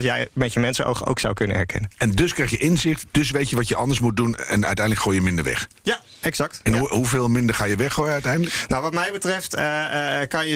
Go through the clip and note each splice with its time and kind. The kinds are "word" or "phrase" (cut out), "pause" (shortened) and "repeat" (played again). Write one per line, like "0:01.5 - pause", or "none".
none